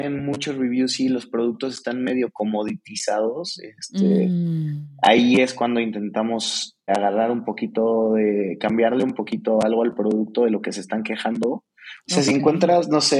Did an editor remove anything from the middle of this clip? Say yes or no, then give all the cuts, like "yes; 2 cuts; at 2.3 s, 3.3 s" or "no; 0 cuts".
yes; 1 cut; at 6.9 s